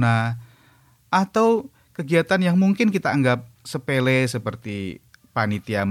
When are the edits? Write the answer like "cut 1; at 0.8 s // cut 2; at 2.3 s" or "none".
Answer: cut 1; at 3.5 s

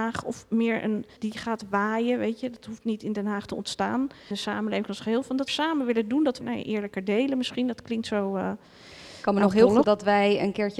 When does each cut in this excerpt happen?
cut 1; at 1.2 s // cut 2; at 4.3 s // cut 3; at 5.5 s // cut 4; at 6.4 s // cut 5; at 9.8 s

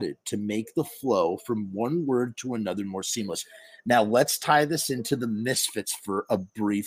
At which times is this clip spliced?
none

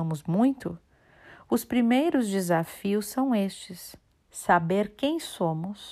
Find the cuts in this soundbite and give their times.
cut 1; at 4.1 s

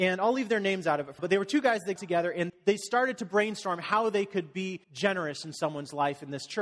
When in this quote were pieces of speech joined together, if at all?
cut 1; at 1.2 s // cut 2; at 2.0 s // cut 3; at 2.5 s // cut 4; at 4.8 s

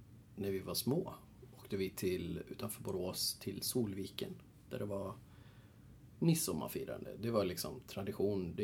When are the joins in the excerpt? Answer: none

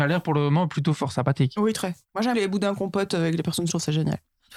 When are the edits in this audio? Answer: cut 1; at 2.0 s // cut 2; at 2.3 s // cut 3; at 3.7 s

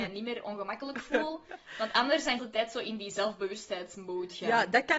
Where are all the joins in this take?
cut 1; at 2.4 s

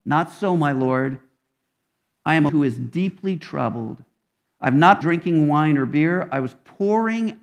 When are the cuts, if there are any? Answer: cut 1; at 2.5 s // cut 2; at 5.0 s

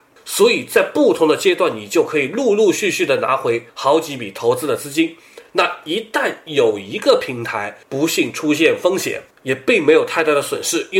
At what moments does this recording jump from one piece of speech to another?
cut 1; at 3.7 s // cut 2; at 7.8 s // cut 3; at 9.3 s

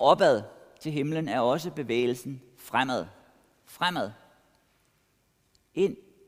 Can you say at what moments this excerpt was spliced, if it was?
none

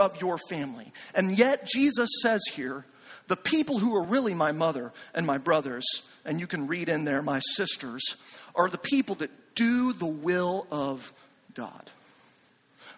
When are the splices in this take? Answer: none

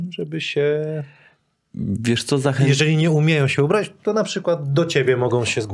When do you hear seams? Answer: none

